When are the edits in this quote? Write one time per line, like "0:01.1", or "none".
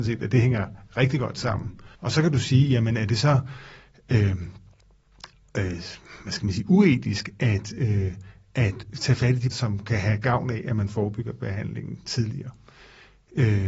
0:01.9
0:09.5